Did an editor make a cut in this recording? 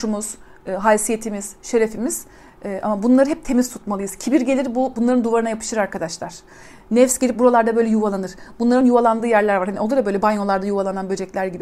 no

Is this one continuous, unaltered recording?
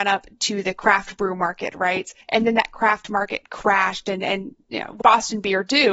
no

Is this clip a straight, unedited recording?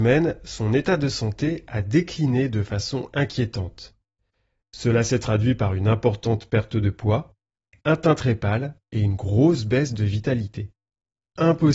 yes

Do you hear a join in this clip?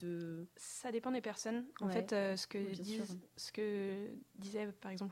no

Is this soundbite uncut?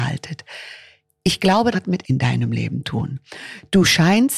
no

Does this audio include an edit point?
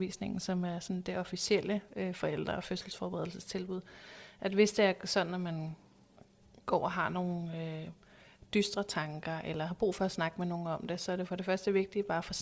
no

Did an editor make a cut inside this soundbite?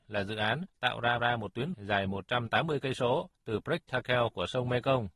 yes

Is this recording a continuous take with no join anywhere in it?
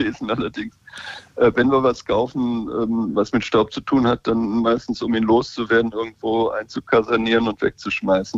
yes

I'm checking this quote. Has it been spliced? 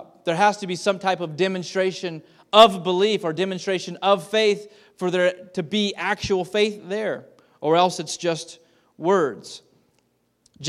no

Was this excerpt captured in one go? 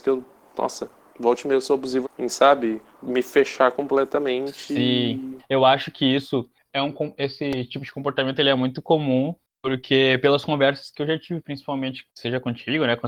no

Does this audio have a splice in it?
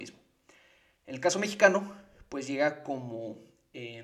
no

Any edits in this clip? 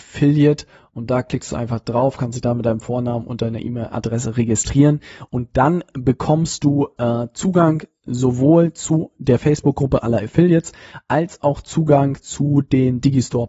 no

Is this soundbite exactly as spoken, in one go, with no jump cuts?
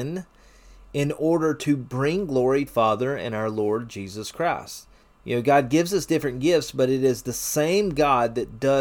no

